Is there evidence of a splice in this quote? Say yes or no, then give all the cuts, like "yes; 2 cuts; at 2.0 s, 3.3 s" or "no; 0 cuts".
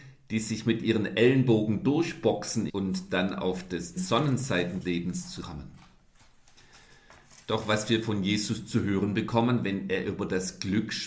yes; 4 cuts; at 2.7 s, 4.0 s, 4.8 s, 5.4 s